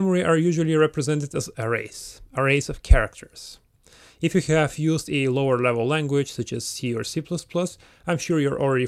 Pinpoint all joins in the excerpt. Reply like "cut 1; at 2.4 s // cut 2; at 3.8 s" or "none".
none